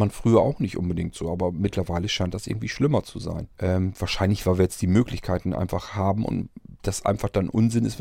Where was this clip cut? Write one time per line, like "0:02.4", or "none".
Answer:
0:03.5
0:06.8